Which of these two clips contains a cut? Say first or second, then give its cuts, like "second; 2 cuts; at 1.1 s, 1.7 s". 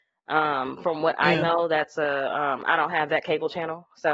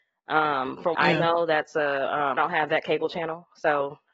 second; 2 cuts; at 0.9 s, 2.4 s